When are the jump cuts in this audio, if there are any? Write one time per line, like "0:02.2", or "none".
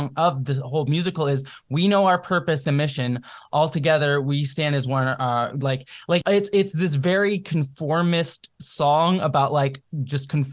0:02.6
0:06.2